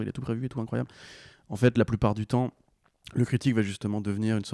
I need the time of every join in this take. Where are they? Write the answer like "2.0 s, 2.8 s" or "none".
none